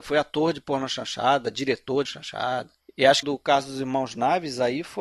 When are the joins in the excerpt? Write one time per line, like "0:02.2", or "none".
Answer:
0:02.0
0:02.8
0:03.2